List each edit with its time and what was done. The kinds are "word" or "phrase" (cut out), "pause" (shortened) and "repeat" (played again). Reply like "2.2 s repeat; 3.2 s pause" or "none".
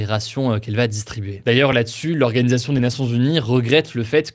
none